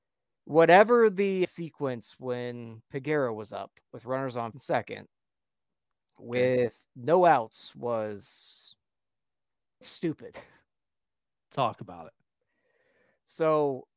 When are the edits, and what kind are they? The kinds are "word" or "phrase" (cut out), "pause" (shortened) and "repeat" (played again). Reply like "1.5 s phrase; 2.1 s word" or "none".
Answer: 1.4 s word; 4.5 s word; 9.8 s word